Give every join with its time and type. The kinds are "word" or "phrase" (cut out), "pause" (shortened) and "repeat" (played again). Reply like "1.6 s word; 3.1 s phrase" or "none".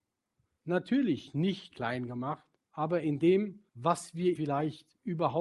1.7 s word; 2.6 s pause; 3.7 s pause; 4.3 s word